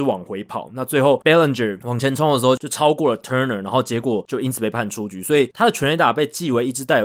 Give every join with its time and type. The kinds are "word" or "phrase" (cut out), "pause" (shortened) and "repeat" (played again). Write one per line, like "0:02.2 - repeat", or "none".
none

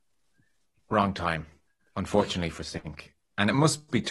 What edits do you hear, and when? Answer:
none

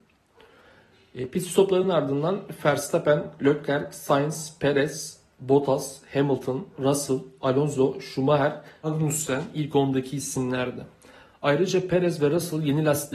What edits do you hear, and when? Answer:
none

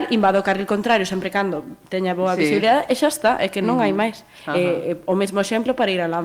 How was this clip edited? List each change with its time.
none

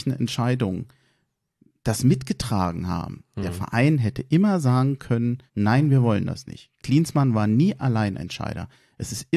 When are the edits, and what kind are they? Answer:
0:05.5 - pause
0:07.8 - word

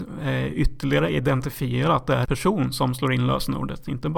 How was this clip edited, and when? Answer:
0:02.3 - word

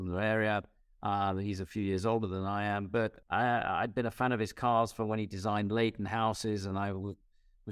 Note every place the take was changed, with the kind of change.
0:03.2 - word

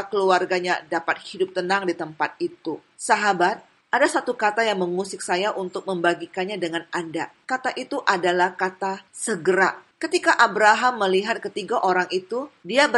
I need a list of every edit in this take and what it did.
0:09.1 - pause

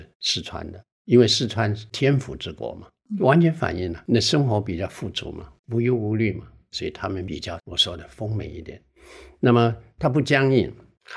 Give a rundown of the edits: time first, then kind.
0:00.9 - pause
0:05.6 - pause

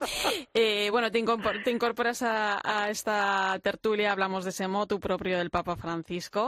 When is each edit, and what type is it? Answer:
none

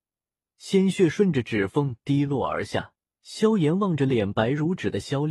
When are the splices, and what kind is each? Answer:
0:03.1 - pause

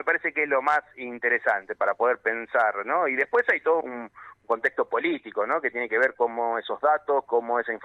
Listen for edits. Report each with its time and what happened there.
0:03.8 - word

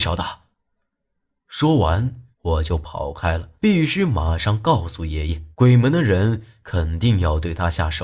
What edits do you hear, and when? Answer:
0:02.3 - pause
0:03.6 - pause
0:05.5 - pause

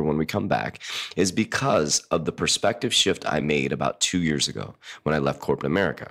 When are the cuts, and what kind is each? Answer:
none

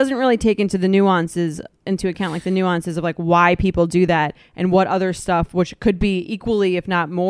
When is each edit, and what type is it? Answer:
0:01.7 - pause

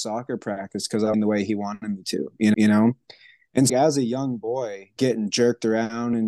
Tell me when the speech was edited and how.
0:01.1 - phrase
0:02.5 - repeat
0:03.7 - phrase
0:05.0 - word

